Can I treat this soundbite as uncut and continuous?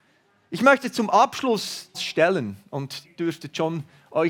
no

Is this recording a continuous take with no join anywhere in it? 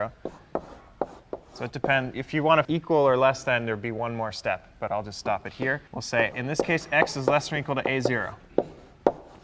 no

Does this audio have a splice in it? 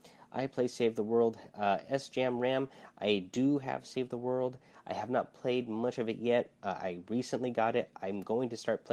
no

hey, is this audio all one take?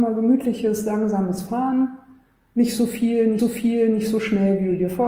no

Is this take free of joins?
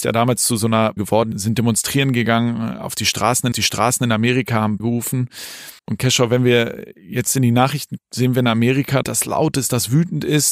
no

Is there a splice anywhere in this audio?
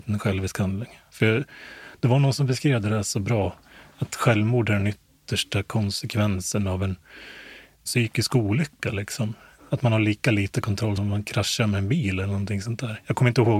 yes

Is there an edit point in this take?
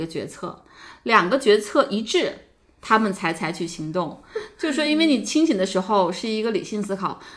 no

